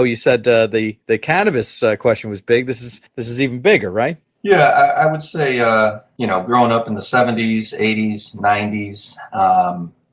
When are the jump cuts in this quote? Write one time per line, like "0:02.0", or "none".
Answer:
0:03.1